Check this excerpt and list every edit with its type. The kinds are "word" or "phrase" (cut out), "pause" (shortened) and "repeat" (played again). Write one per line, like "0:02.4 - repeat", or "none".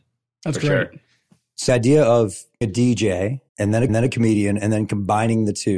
0:01.7 - word
0:02.6 - word
0:03.5 - pause
0:03.9 - repeat